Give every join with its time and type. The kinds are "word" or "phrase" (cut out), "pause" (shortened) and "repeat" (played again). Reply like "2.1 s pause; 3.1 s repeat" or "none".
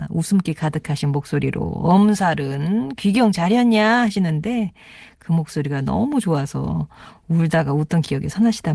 none